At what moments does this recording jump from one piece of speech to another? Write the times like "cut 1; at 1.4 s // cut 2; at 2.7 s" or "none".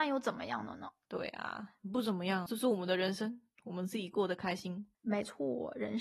cut 1; at 2.5 s // cut 2; at 4.9 s

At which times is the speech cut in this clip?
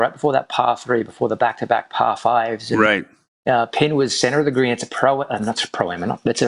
none

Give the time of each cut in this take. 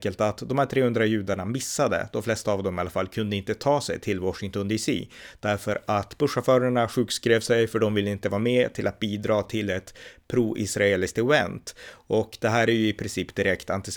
none

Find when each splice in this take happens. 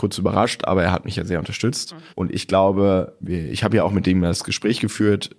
cut 1; at 2.1 s // cut 2; at 3.2 s

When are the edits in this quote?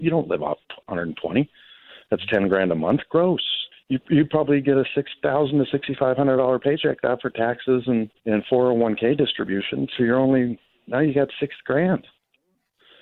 cut 1; at 3.7 s // cut 2; at 8.2 s

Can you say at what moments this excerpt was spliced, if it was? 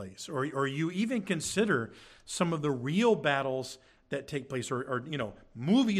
none

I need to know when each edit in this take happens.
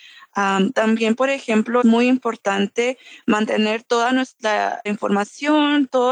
cut 1; at 1.8 s // cut 2; at 4.9 s

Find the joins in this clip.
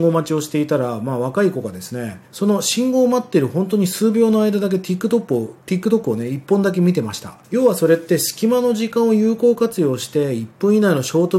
cut 1; at 2.2 s // cut 2; at 7.4 s

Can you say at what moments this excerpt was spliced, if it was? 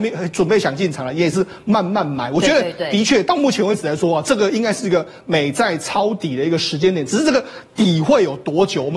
none

